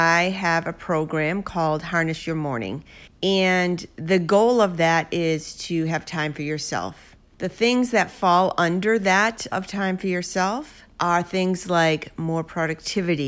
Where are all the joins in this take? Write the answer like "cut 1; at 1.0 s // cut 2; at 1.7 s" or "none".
cut 1; at 9.5 s